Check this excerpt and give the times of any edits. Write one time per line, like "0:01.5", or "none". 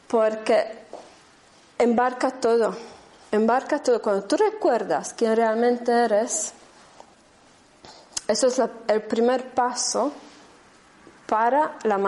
none